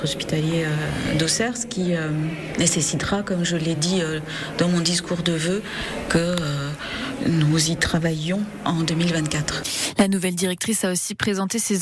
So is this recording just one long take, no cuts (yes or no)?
yes